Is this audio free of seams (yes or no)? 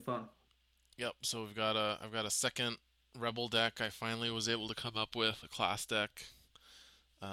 yes